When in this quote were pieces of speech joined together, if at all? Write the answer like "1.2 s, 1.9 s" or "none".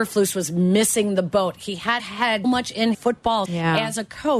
2.0 s, 2.4 s, 2.9 s, 3.5 s